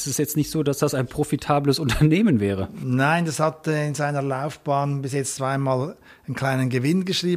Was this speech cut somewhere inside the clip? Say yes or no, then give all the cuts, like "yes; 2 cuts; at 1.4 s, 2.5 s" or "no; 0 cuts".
no; 0 cuts